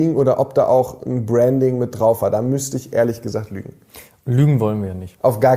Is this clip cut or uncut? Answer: uncut